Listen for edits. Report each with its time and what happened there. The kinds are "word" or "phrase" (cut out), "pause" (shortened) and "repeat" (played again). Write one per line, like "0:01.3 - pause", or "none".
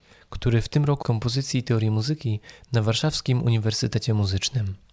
0:01.0 - phrase